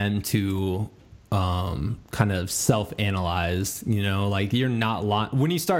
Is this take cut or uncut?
uncut